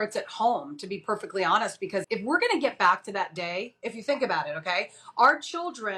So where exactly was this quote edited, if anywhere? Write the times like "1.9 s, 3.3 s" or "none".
2.0 s